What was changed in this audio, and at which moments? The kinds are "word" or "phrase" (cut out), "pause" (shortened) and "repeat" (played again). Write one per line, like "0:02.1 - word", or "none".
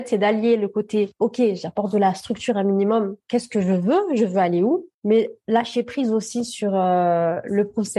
0:04.9 - pause